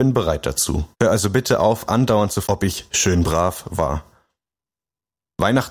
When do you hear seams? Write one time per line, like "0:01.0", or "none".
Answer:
0:00.9
0:02.4

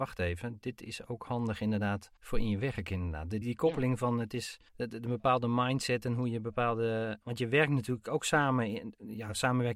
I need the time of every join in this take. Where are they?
0:02.2
0:03.4
0:04.7

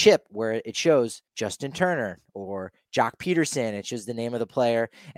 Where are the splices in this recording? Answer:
0:01.3

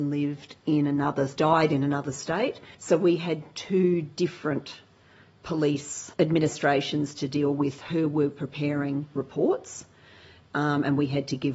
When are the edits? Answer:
0:01.4
0:02.7
0:06.1

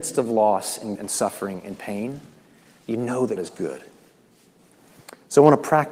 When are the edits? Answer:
0:01.0
0:03.4

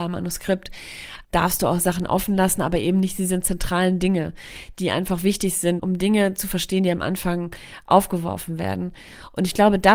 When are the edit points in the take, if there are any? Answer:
0:01.2
0:05.8

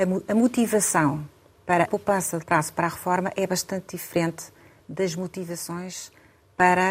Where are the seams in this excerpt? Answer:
0:01.8
0:02.4

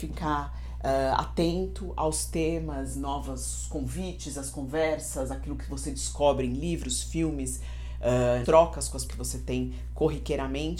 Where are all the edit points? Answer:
0:02.9
0:08.4
0:09.1

